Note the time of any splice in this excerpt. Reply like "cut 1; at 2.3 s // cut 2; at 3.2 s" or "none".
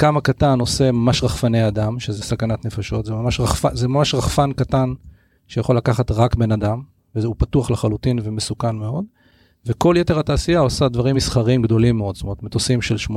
none